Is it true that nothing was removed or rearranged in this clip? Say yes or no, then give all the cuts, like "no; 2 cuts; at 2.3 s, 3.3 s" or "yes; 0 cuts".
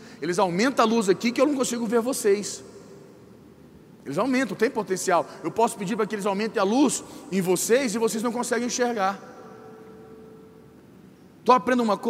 yes; 0 cuts